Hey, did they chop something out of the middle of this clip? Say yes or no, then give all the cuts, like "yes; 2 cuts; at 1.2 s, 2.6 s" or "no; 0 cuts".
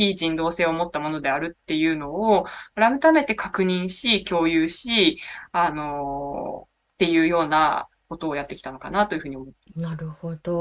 no; 0 cuts